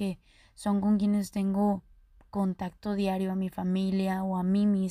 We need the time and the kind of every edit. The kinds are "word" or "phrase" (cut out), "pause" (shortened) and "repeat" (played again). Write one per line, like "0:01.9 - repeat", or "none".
none